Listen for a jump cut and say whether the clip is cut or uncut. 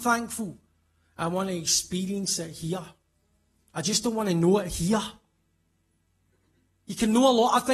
uncut